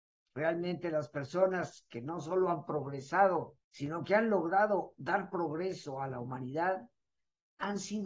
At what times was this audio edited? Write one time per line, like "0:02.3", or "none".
0:03.6

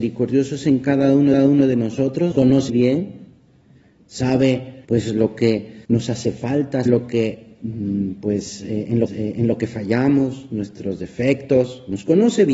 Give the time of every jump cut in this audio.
0:01.3
0:02.3
0:02.7
0:04.8
0:05.8
0:06.9
0:09.1

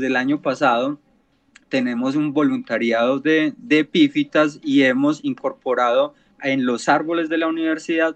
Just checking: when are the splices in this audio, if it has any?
none

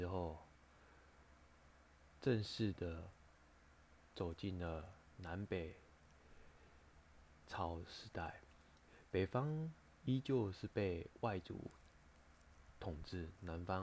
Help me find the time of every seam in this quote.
none

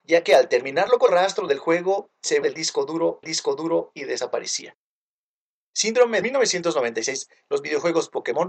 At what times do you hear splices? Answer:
0:01.1
0:02.4
0:03.2
0:06.2

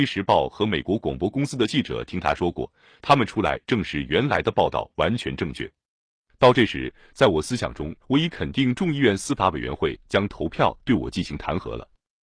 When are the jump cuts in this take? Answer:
0:08.0

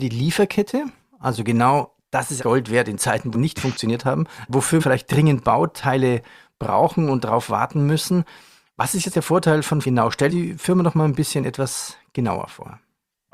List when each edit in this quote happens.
0:02.4
0:03.3
0:04.8
0:09.1
0:09.8
0:10.3

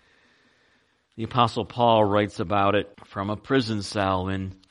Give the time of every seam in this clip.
0:02.9

